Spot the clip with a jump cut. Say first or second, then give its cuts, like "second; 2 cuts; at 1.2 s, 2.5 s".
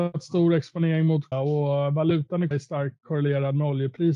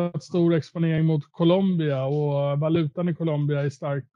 first; 2 cuts; at 1.3 s, 2.5 s